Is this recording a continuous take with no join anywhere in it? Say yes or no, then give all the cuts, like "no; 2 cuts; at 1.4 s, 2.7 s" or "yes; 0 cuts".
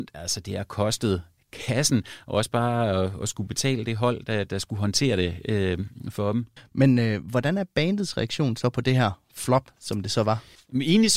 yes; 0 cuts